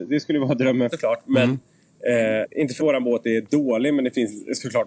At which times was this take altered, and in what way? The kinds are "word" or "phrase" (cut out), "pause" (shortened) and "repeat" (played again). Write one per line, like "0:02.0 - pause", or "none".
0:00.9 - phrase
0:02.4 - word
0:02.8 - word